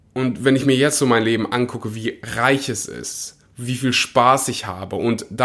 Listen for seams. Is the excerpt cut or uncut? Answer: uncut